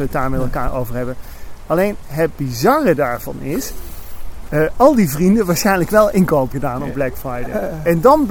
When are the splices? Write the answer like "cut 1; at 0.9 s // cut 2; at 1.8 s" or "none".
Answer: cut 1; at 4.5 s // cut 2; at 6.5 s